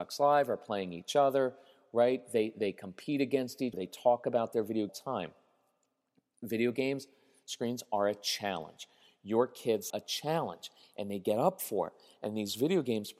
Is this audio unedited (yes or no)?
no